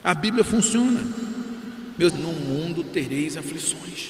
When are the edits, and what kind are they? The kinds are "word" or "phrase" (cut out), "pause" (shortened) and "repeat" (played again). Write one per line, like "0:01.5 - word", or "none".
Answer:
0:02.1 - word